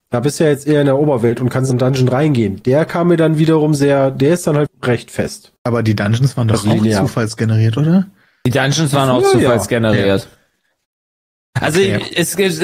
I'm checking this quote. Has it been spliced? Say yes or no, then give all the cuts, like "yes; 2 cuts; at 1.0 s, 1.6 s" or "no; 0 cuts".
yes; 3 cuts; at 1.7 s, 4.7 s, 5.6 s